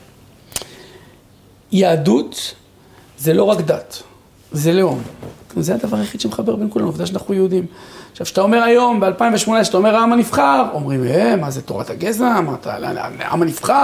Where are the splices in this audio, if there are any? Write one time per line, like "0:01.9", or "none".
none